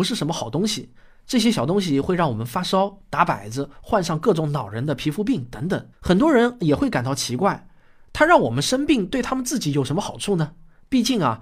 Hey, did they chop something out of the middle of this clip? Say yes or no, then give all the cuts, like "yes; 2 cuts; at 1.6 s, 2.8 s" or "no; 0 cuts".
yes; 1 cut; at 5.9 s